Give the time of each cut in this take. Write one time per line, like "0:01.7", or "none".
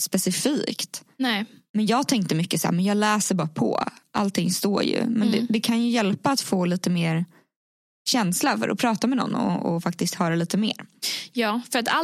none